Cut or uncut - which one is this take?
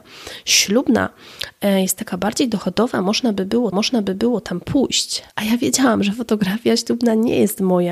cut